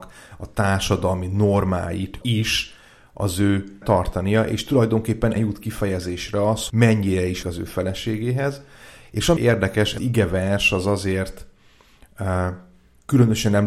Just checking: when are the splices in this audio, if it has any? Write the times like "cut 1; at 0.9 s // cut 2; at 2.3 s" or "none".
cut 1; at 2.2 s // cut 2; at 3.8 s // cut 3; at 5.4 s // cut 4; at 6.7 s // cut 5; at 7.4 s // cut 6; at 9.4 s // cut 7; at 10.0 s